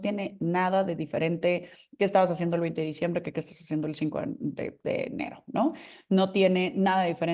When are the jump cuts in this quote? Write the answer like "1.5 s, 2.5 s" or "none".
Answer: none